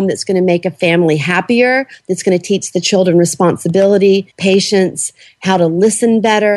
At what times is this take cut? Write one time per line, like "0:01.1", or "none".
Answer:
0:04.3